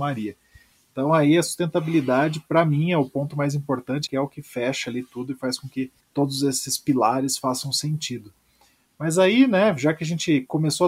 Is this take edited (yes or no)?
yes